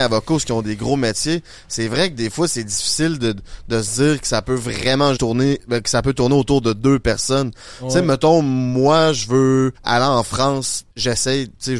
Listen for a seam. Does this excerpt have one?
yes; 3 cuts; at 5.2 s, 9.8 s, 10.9 s

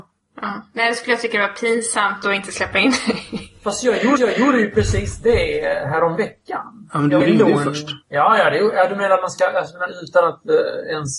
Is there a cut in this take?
yes; 3 cuts; at 4.2 s, 7.2 s, 8.0 s

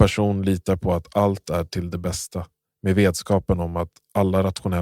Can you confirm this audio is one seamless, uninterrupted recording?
yes; 0 cuts

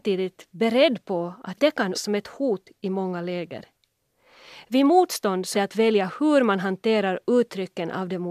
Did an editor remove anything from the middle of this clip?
yes; 3 cuts; at 1.6 s, 1.9 s, 5.5 s

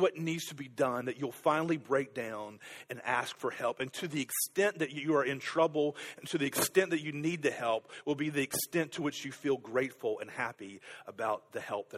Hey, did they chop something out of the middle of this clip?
no; 0 cuts

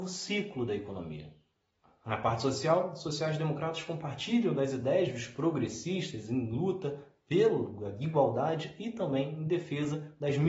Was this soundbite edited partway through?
no; 0 cuts

